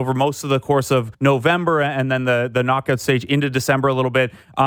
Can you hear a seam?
yes; 1 cut; at 1.1 s

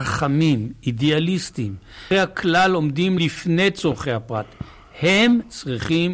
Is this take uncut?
no; 2 cuts; at 2.1 s, 3.2 s

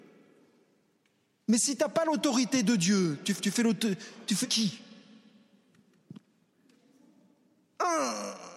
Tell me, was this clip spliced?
yes; 2 cuts; at 3.4 s, 4.4 s

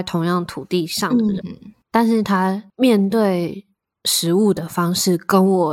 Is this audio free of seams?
no; 1 cut; at 1.4 s

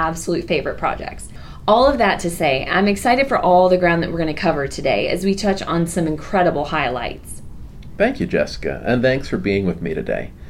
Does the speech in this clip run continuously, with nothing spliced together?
yes; 0 cuts

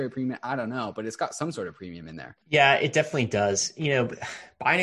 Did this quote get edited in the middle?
yes; 1 cut; at 2.4 s

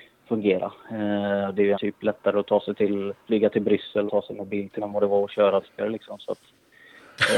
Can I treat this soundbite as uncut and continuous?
no; 5 cuts; at 1.7 s, 3.2 s, 4.1 s, 4.8 s, 5.6 s

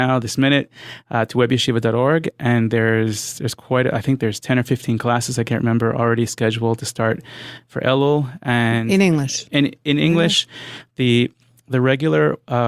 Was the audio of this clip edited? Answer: no; 0 cuts

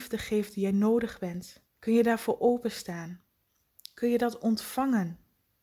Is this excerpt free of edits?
no; 1 cut; at 1.7 s

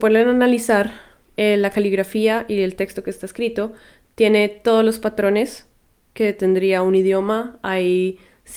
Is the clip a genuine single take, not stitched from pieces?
yes; 0 cuts

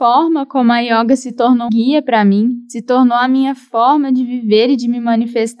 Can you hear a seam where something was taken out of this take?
yes; 1 cut; at 1.7 s

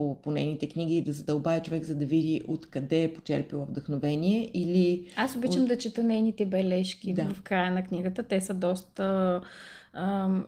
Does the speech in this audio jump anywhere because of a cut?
no; 0 cuts

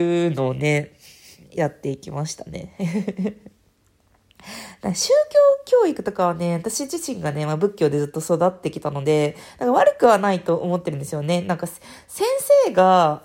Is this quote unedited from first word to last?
yes; 0 cuts

